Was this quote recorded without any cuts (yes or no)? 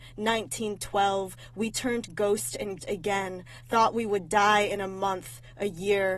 no